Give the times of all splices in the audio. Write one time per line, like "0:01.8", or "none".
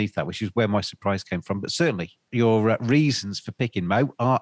0:02.3